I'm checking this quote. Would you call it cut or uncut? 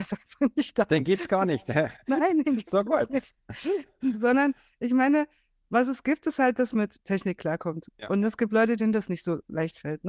cut